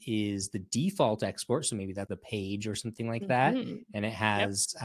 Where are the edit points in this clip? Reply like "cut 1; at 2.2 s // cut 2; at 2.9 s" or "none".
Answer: cut 1; at 2.1 s